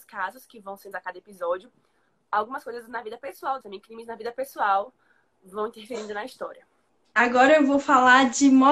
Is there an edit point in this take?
yes; 2 cuts; at 0.9 s, 3.6 s

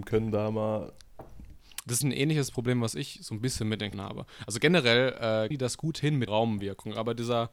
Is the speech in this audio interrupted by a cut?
yes; 4 cuts; at 2.0 s, 3.9 s, 5.5 s, 6.3 s

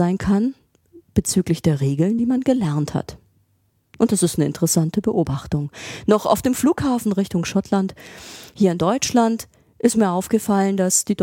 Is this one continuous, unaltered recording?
yes; 0 cuts

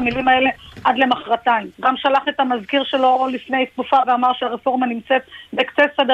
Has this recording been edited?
yes; 1 cut; at 1.7 s

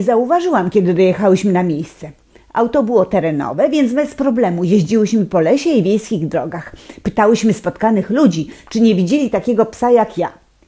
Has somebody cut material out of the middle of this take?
no; 0 cuts

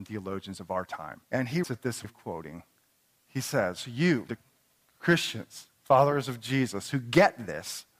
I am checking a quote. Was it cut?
yes; 5 cuts; at 1.2 s, 1.6 s, 2.0 s, 3.0 s, 4.3 s

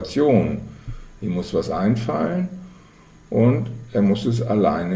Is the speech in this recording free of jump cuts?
yes; 0 cuts

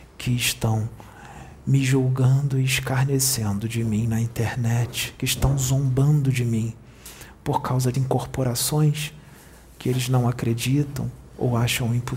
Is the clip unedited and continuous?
no; 1 cut; at 7.9 s

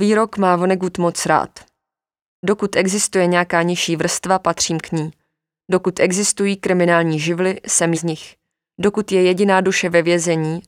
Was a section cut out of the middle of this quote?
yes; 1 cut; at 7.9 s

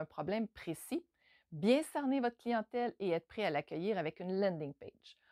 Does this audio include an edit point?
no; 0 cuts

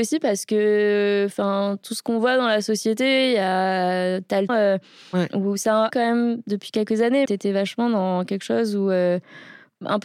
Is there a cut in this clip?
yes; 3 cuts; at 4.5 s, 5.9 s, 7.3 s

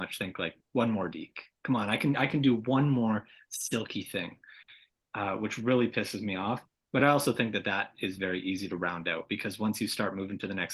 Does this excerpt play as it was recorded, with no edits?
yes; 0 cuts

